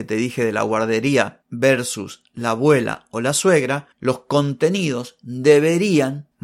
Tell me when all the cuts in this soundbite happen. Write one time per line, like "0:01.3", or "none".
none